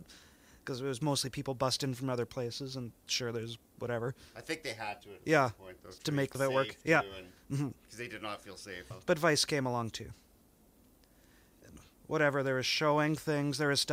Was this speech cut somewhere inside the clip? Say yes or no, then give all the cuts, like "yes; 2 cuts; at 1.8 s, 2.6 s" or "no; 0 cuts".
yes; 3 cuts; at 6.3 s, 7.4 s, 8.9 s